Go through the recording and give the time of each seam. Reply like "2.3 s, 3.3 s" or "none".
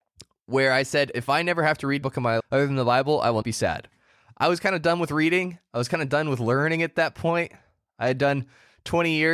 2.0 s, 2.4 s, 3.4 s